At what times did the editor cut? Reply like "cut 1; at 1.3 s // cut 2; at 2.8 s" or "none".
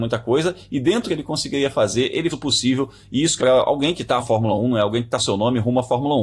cut 1; at 1.1 s // cut 2; at 2.3 s // cut 3; at 3.4 s // cut 4; at 4.2 s // cut 5; at 5.2 s

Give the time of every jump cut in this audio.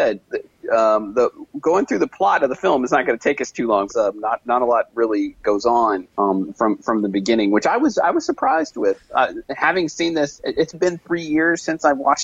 cut 1; at 3.9 s // cut 2; at 5.4 s // cut 3; at 6.1 s // cut 4; at 10.7 s

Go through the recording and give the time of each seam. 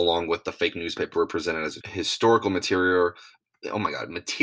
cut 1; at 1.1 s // cut 2; at 1.8 s

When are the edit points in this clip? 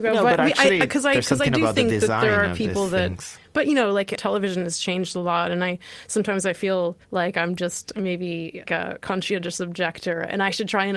cut 1; at 4.1 s // cut 2; at 7.0 s // cut 3; at 8.6 s

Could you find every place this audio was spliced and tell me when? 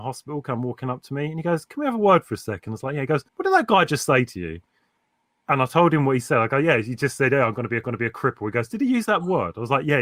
cut 1; at 3.3 s // cut 2; at 7.8 s

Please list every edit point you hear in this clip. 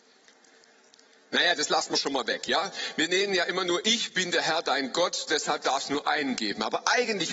none

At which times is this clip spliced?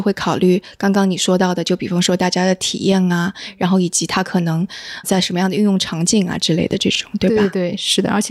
cut 1; at 5.0 s

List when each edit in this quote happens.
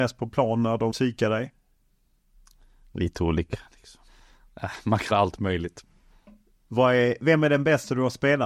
cut 1; at 0.9 s // cut 2; at 4.1 s // cut 3; at 5.1 s // cut 4; at 6.1 s

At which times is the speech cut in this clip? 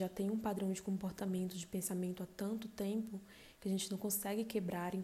none

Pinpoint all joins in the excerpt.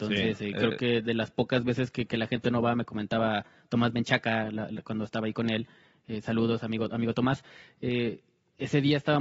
none

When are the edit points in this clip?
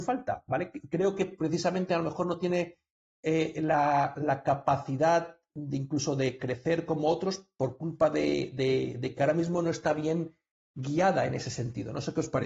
none

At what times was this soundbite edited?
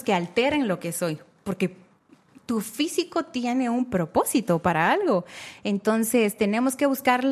none

